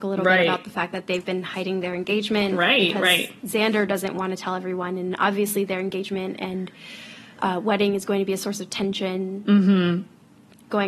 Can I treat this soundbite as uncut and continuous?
yes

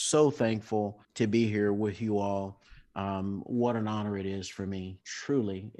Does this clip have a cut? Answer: yes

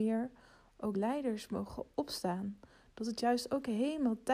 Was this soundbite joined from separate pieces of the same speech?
yes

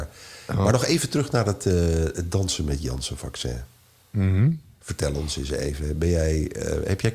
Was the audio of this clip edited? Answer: no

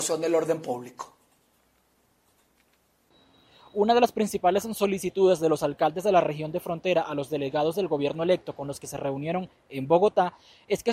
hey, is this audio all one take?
yes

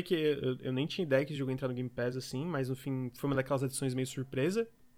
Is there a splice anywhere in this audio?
no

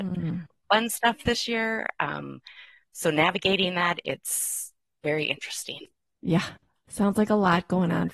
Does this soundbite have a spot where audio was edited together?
no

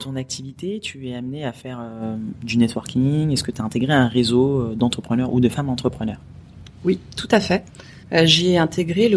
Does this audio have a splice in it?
yes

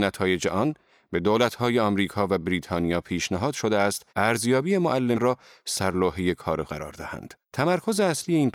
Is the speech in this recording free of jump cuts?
no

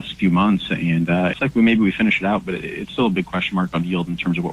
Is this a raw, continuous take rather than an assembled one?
no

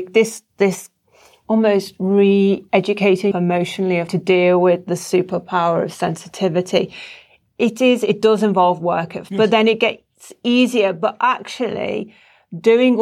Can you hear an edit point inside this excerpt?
yes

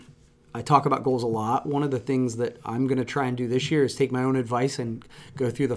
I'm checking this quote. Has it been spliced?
no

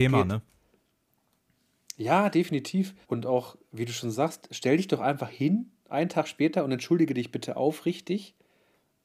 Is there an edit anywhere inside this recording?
yes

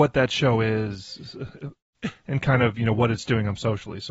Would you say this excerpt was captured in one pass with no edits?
yes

